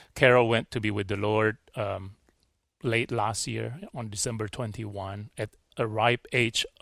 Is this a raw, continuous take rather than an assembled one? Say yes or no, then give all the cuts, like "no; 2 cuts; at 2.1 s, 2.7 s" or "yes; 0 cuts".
yes; 0 cuts